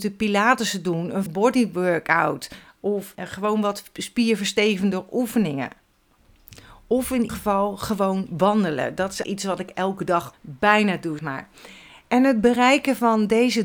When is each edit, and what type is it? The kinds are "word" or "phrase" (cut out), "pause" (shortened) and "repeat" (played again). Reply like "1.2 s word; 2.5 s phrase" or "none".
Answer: 1.3 s word; 3.1 s word; 7.3 s word; 9.2 s word; 10.3 s word; 11.2 s word